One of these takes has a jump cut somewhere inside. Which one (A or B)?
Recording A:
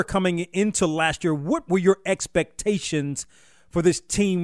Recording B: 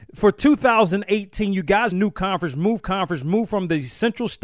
B